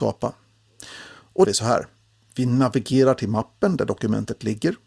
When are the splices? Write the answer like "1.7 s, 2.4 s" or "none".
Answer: 1.4 s